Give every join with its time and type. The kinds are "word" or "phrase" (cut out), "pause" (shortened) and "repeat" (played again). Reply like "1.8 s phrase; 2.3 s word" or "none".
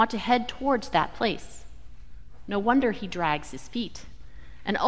none